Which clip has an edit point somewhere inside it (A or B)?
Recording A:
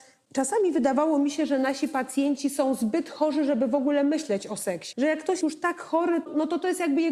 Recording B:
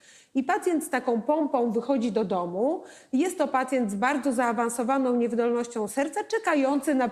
A